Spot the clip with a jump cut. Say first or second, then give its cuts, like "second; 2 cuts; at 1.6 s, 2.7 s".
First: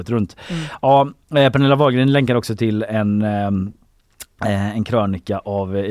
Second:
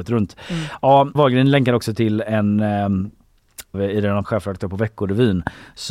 second; 3 cuts; at 1.1 s, 3.7 s, 4.2 s